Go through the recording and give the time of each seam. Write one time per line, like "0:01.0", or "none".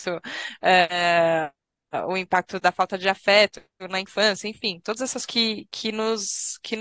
0:02.6
0:05.3